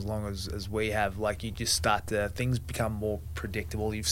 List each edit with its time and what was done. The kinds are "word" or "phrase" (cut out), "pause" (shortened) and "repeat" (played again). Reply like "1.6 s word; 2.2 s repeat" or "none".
none

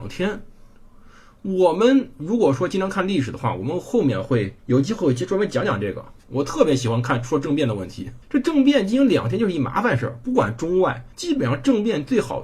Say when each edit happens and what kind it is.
4.6 s pause; 8.2 s pause; 11.1 s pause

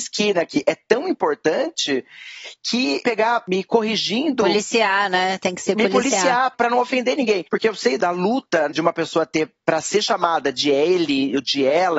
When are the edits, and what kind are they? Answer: 3.0 s phrase; 8.7 s word

